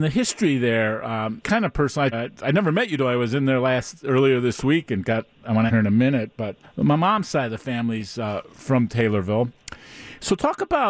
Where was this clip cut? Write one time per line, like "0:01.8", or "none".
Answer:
0:01.4
0:02.1
0:05.7
0:06.6